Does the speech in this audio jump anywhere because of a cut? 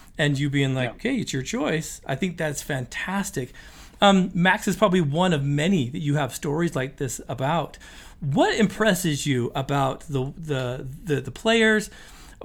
no; 0 cuts

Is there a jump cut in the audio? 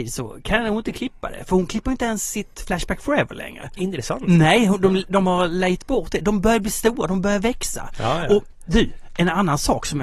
yes; 1 cut; at 2.5 s

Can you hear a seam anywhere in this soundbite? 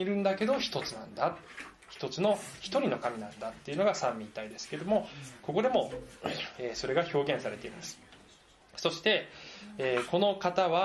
no; 0 cuts

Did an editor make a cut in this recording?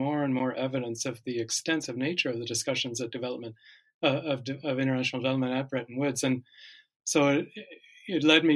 no; 0 cuts

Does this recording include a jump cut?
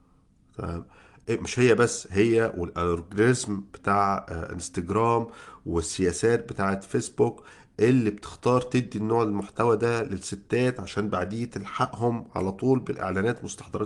no; 0 cuts

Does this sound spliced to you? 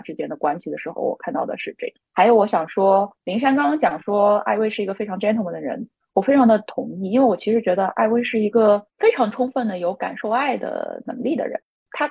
no; 0 cuts

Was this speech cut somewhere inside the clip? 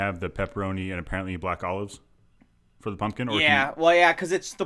no; 0 cuts

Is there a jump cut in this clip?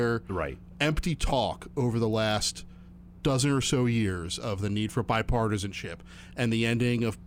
no; 0 cuts

